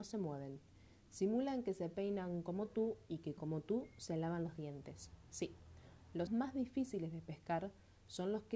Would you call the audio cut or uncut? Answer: cut